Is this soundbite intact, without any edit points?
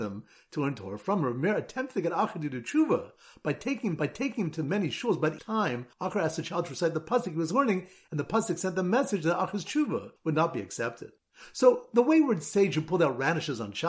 no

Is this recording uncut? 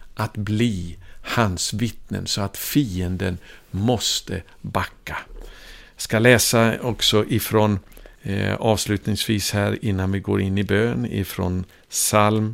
no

